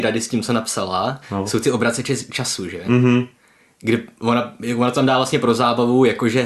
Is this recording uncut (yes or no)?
yes